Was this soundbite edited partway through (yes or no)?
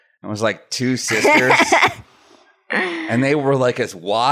no